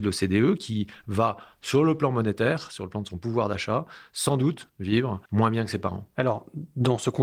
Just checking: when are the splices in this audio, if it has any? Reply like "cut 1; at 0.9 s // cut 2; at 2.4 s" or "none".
cut 1; at 5.2 s // cut 2; at 6.1 s